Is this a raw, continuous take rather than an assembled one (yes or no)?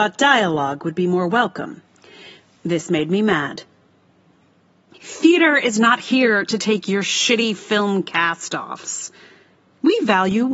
yes